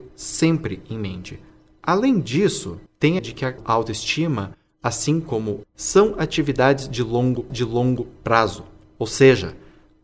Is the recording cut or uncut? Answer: cut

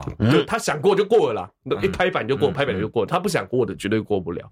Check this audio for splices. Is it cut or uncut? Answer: uncut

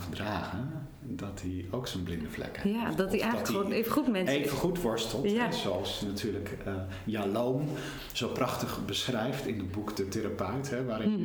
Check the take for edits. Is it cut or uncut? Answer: uncut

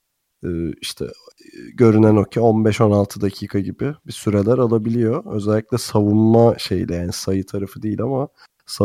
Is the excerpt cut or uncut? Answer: uncut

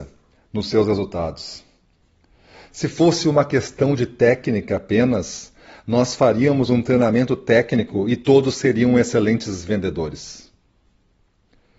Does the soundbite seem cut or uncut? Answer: uncut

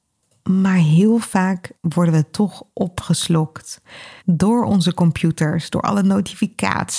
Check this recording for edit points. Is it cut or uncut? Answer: cut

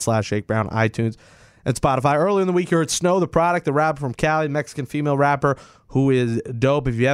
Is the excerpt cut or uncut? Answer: uncut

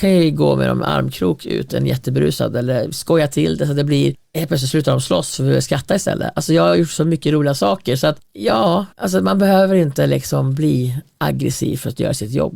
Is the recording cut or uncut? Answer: cut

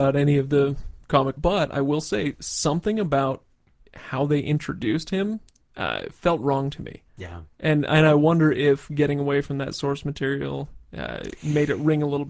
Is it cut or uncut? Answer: cut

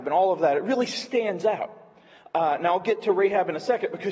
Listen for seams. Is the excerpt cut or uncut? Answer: uncut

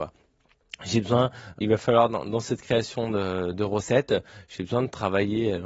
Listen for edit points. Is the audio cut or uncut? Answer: cut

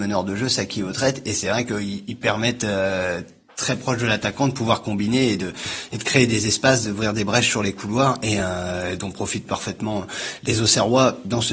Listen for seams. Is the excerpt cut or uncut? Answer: uncut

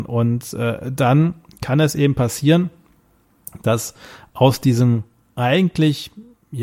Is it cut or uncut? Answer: uncut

